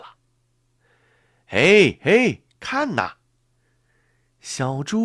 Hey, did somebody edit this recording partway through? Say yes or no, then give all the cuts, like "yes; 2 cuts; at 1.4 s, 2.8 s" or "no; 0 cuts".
no; 0 cuts